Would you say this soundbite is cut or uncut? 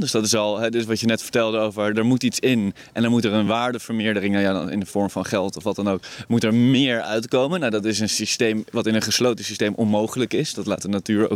uncut